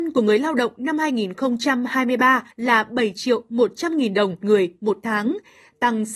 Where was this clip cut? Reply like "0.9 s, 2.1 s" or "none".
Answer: 2.5 s, 4.4 s